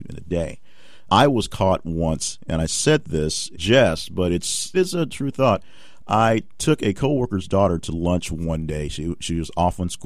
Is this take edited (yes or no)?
yes